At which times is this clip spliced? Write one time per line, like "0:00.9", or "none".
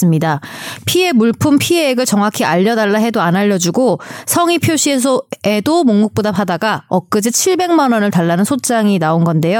none